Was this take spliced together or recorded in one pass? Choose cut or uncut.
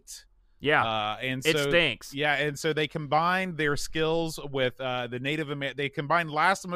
uncut